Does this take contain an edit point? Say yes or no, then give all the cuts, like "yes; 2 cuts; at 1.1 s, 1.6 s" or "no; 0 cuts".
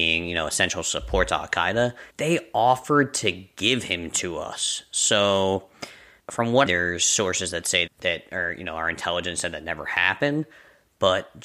yes; 4 cuts; at 2.1 s, 6.2 s, 6.6 s, 7.9 s